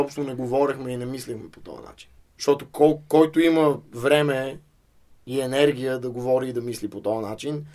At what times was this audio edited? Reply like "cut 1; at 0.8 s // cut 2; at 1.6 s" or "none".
none